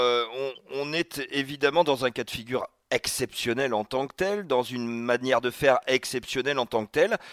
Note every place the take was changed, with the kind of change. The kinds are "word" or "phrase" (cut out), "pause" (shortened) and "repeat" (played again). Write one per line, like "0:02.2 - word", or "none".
none